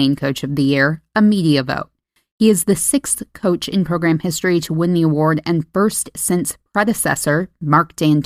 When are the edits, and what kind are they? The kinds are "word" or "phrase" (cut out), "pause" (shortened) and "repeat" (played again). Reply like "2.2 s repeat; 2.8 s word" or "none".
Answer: none